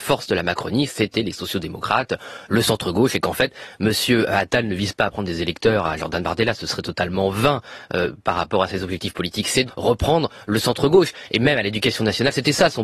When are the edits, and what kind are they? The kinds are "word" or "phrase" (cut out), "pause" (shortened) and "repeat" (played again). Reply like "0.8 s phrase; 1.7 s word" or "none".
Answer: 9.7 s word